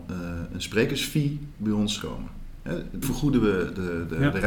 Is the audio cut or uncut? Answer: cut